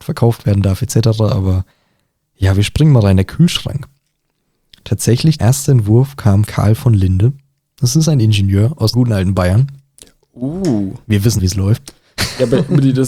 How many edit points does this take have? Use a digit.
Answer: 4